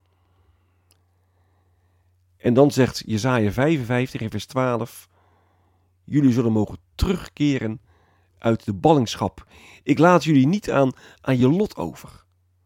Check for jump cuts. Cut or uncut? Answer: uncut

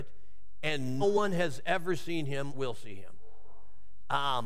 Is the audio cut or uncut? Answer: cut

